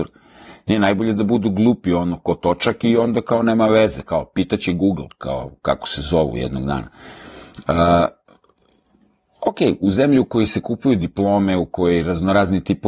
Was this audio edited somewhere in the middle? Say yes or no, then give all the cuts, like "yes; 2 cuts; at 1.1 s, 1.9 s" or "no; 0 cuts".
no; 0 cuts